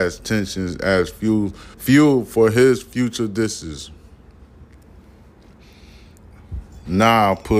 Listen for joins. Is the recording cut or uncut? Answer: cut